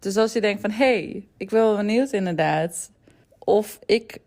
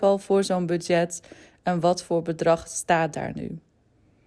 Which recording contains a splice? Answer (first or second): first